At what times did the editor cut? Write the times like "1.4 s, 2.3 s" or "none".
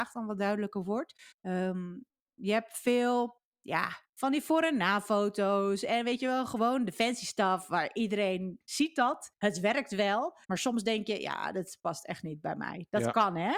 1.3 s, 4.1 s, 9.4 s, 10.4 s